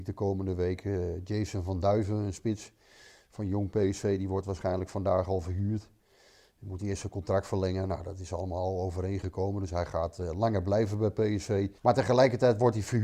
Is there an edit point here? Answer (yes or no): yes